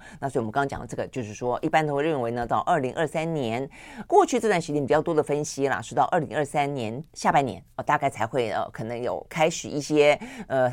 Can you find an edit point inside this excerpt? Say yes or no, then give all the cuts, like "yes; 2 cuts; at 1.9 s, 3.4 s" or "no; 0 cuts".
yes; 2 cuts; at 4.1 s, 7.1 s